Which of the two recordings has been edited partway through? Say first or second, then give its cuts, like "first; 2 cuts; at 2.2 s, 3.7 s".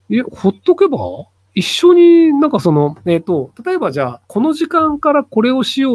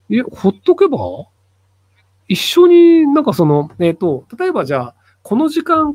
first; 2 cuts; at 1.4 s, 4.2 s